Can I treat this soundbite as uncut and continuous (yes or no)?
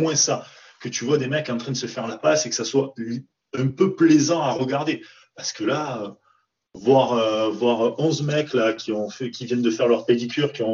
yes